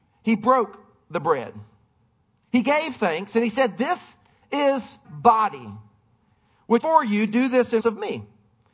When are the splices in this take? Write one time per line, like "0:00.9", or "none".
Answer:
0:05.0
0:06.8
0:07.8